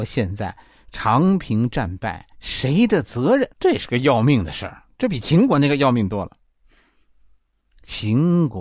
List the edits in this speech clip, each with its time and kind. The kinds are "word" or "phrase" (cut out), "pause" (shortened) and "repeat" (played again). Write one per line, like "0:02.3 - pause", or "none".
0:02.3 - pause
0:03.5 - pause

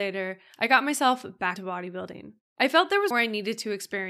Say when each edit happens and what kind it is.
0:01.6 - word
0:02.4 - pause
0:03.1 - word

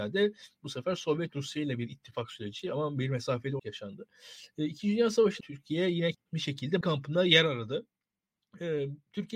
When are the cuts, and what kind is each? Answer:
0:03.6 - word
0:05.4 - word
0:06.1 - word
0:06.8 - word

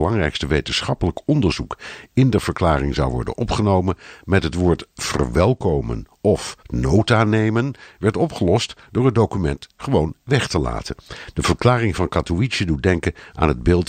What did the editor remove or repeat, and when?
0:06.6 - pause

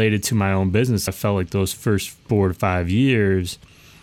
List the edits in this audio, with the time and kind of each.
0:01.1 - word
0:02.2 - pause

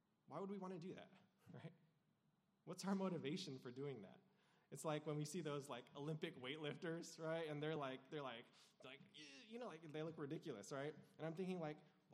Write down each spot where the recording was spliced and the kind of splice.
none

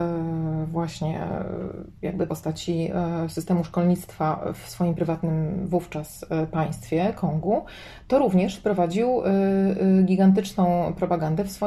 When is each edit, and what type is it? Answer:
0:02.3 - phrase

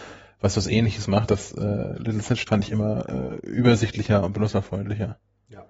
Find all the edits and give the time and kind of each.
0:01.3 - phrase
0:02.5 - word

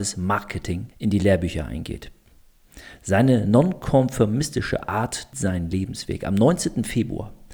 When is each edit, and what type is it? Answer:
0:00.9 - pause
0:05.3 - word

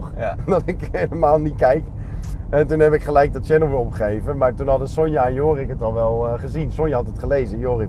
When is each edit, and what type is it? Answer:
none

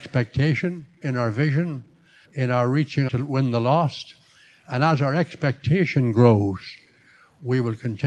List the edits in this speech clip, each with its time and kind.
0:01.0 - word
0:02.2 - word
0:03.1 - word

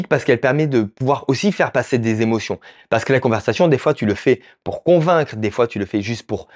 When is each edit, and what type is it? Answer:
none

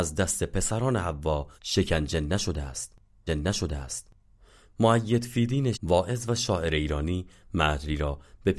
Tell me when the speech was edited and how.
0:01.6 - pause
0:03.3 - repeat
0:05.7 - word

